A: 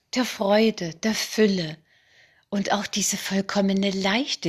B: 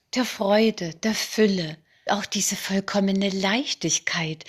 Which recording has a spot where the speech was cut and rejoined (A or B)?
B